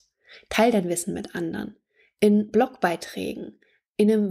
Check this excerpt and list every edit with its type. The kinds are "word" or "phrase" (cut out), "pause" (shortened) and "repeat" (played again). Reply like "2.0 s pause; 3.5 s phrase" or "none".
none